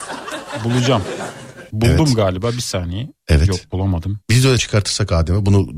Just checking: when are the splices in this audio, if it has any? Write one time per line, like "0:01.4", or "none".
0:04.2
0:04.6